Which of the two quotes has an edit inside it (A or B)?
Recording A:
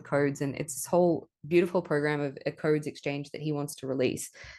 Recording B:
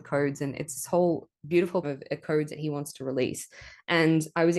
B